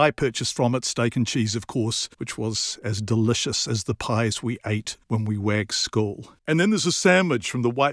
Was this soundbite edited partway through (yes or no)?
yes